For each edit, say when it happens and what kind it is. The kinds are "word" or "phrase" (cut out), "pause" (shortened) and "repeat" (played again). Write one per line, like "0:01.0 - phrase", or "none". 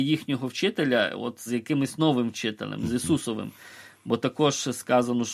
0:01.5 - word

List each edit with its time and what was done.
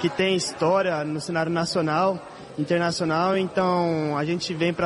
none

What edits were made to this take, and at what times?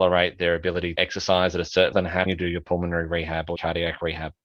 0:01.0 - word
0:01.9 - word
0:02.3 - word
0:03.6 - word

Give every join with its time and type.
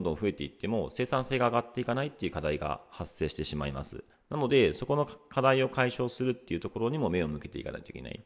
0:04.1 - pause

